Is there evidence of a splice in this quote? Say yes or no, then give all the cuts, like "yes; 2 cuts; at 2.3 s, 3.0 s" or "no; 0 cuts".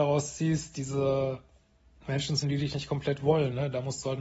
yes; 1 cut; at 2.4 s